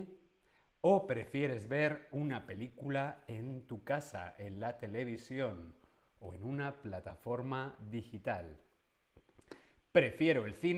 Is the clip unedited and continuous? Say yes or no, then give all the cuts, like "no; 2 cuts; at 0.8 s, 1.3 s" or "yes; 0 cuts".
yes; 0 cuts